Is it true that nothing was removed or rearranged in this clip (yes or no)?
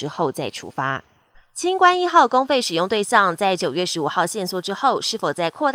yes